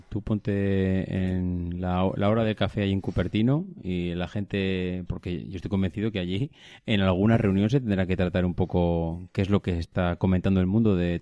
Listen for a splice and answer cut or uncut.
uncut